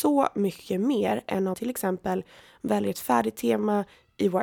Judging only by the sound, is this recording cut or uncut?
cut